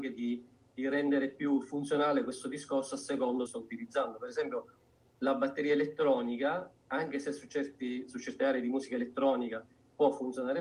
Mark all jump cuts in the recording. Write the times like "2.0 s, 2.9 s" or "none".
3.5 s